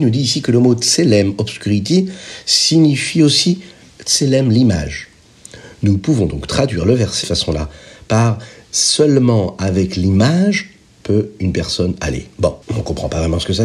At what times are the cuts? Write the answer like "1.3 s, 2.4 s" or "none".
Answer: 7.2 s, 12.6 s